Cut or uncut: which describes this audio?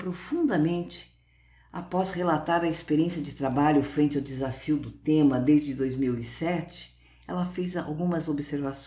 uncut